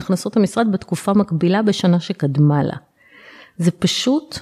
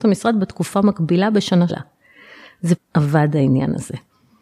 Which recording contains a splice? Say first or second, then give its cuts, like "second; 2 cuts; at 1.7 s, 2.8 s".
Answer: second; 2 cuts; at 1.7 s, 2.8 s